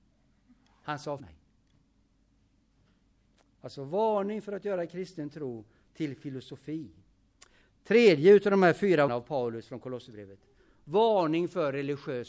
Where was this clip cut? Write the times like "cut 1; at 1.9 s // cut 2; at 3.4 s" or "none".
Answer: cut 1; at 1.2 s // cut 2; at 9.1 s

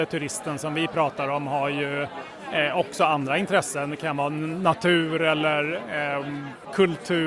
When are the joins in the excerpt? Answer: none

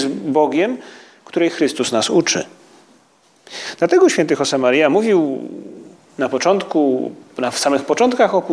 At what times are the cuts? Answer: none

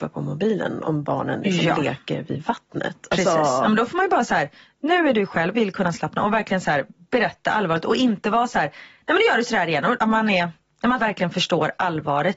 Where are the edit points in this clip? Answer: cut 1; at 5.5 s // cut 2; at 10.0 s // cut 3; at 11.0 s

